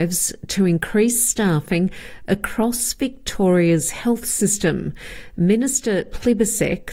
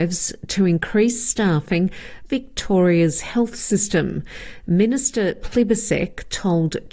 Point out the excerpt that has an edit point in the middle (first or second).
second